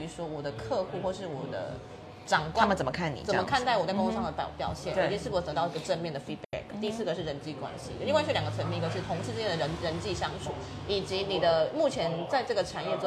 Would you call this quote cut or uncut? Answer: uncut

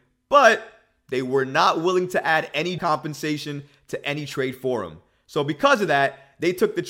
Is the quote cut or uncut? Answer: cut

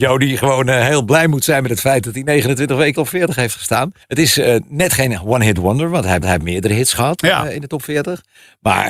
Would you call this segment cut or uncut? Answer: cut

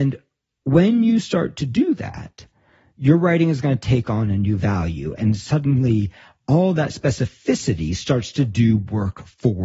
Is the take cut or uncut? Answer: uncut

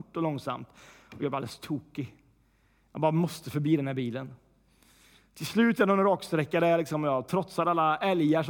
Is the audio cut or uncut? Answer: uncut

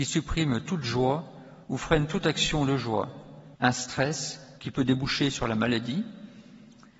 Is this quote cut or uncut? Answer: cut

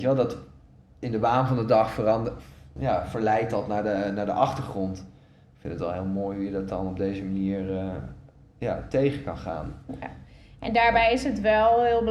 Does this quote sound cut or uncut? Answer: uncut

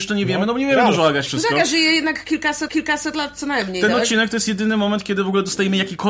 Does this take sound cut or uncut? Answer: cut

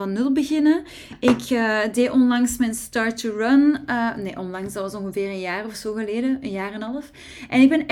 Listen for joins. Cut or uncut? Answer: uncut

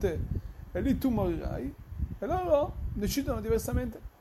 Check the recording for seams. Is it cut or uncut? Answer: uncut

